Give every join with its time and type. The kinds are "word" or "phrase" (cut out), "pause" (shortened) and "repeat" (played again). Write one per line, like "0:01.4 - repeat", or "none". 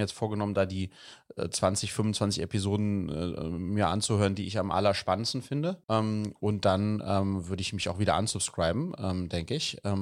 0:05.8 - pause